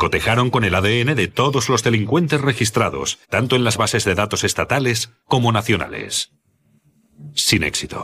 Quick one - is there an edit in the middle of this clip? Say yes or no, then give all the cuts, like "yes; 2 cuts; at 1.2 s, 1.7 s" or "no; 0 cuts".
yes; 1 cut; at 3.2 s